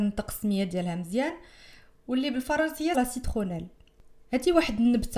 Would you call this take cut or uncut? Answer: cut